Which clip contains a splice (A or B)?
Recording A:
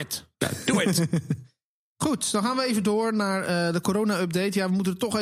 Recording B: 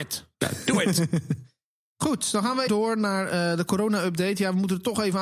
B